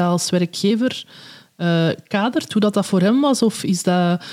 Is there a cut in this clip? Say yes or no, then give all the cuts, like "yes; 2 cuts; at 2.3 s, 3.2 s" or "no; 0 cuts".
no; 0 cuts